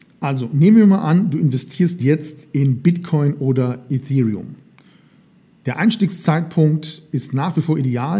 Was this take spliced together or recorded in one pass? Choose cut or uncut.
uncut